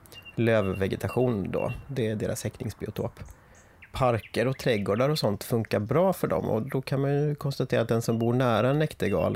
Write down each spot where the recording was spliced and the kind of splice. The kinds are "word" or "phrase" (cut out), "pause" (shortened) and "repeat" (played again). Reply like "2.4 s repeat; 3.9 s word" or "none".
6.6 s word